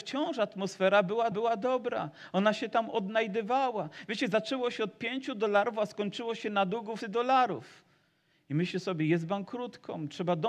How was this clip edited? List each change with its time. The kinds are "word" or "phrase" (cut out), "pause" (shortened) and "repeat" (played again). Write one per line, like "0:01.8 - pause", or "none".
0:01.3 - repeat
0:07.0 - phrase